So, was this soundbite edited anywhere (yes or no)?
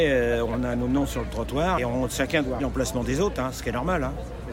yes